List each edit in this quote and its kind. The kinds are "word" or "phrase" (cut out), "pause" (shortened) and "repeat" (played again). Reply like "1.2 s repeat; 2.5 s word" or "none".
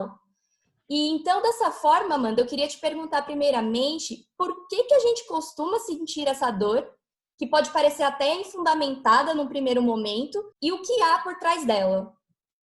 10.5 s pause